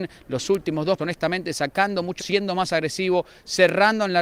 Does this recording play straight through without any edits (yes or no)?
no